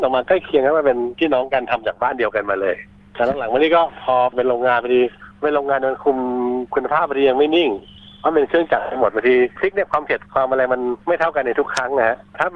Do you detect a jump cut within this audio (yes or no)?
yes